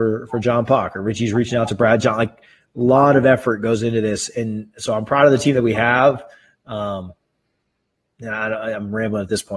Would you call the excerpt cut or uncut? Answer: uncut